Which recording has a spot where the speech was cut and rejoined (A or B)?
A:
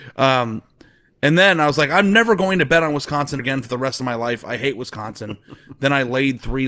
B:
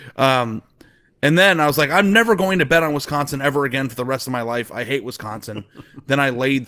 A